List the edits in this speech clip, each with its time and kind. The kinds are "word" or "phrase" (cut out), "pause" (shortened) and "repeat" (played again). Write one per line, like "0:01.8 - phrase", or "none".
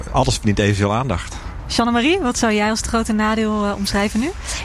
none